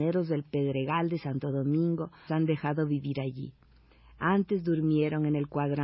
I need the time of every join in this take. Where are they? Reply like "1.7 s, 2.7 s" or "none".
2.3 s